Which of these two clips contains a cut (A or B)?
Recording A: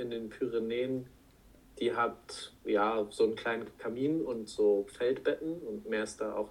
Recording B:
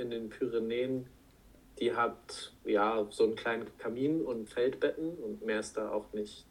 B